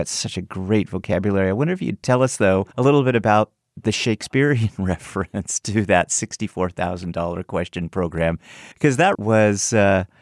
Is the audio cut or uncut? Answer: cut